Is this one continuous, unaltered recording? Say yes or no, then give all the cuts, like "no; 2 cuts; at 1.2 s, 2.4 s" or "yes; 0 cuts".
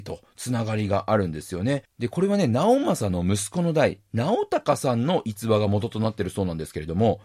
yes; 0 cuts